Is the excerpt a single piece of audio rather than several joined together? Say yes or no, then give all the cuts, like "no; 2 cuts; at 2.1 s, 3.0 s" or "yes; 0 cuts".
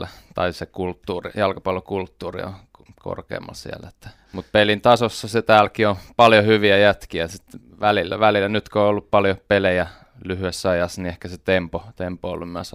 yes; 0 cuts